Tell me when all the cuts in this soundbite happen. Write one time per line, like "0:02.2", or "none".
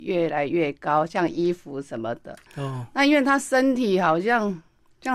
0:02.5